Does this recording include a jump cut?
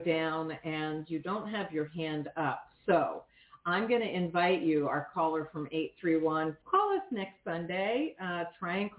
yes; 1 cut; at 6.6 s

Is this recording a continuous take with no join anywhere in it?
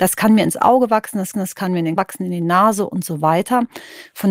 no; 2 cuts; at 1.3 s, 2.0 s

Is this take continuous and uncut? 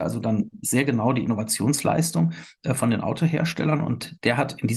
yes; 0 cuts

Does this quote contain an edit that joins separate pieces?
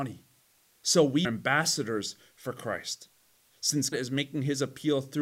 yes; 2 cuts; at 1.2 s, 3.9 s

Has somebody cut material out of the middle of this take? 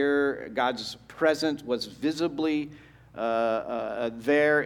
no; 0 cuts

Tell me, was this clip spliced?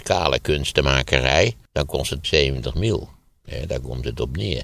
yes; 2 cuts; at 1.7 s, 2.2 s

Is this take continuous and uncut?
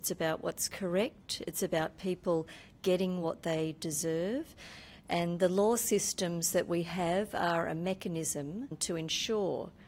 yes; 0 cuts

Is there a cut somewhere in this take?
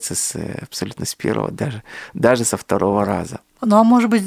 no; 0 cuts

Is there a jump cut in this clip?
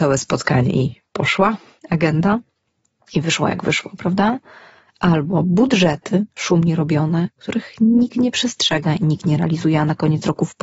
no; 0 cuts

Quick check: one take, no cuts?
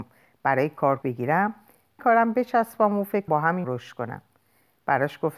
no; 4 cuts; at 1.0 s, 2.0 s, 3.3 s, 3.6 s

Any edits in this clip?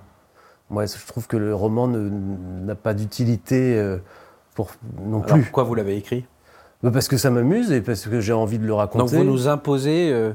no; 0 cuts

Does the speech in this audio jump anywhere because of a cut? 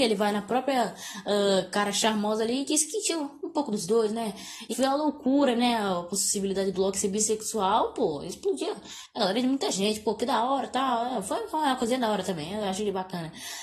yes; 1 cut; at 4.7 s

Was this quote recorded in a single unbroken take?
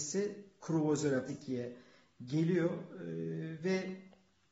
no; 1 cut; at 1.3 s

